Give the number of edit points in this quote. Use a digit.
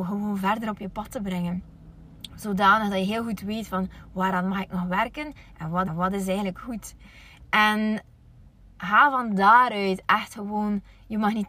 2